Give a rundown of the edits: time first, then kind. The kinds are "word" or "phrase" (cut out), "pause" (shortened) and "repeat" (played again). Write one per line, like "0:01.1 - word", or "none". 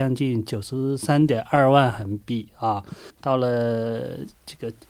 0:03.1 - pause